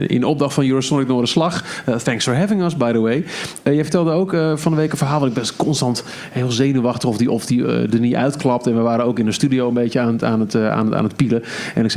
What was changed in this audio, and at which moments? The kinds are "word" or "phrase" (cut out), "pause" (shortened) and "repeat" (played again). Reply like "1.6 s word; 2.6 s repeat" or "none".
none